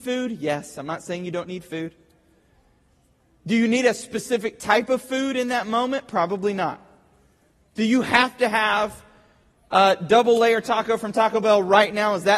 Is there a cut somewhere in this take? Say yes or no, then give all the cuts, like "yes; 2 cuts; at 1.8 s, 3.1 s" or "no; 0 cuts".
no; 0 cuts